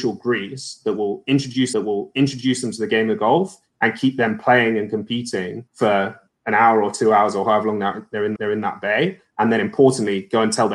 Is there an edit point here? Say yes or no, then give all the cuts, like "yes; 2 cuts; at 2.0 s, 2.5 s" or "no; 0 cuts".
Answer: yes; 3 cuts; at 1.7 s, 5.7 s, 8.4 s